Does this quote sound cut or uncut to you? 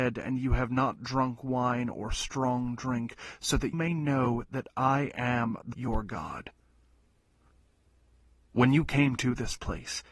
cut